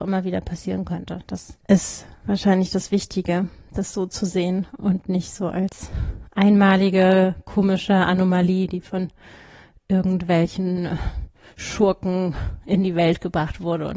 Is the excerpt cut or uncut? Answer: cut